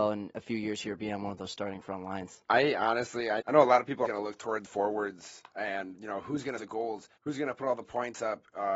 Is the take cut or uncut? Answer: cut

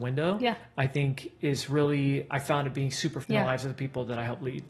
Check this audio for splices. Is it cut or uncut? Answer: cut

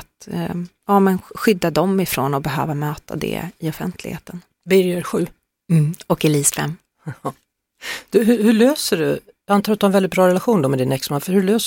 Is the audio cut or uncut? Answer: uncut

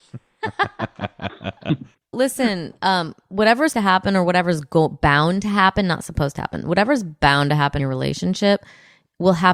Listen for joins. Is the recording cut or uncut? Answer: cut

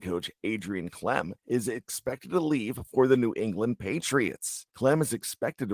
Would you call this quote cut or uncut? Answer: cut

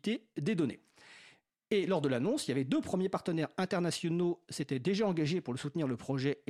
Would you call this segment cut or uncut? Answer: uncut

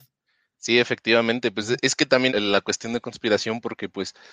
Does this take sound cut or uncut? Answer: cut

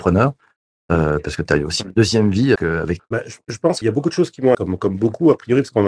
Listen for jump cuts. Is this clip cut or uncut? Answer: cut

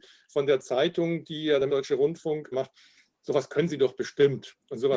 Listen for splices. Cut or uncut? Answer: cut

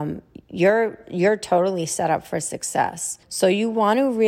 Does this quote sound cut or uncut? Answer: cut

